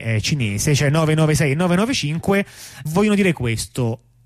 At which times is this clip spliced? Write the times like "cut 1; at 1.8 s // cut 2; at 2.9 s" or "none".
cut 1; at 2.9 s